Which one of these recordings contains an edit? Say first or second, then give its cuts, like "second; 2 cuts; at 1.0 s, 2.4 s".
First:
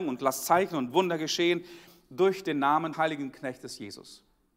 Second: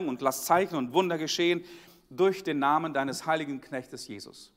first; 1 cut; at 2.9 s